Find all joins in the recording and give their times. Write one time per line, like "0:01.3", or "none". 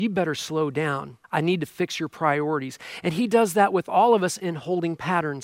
0:01.2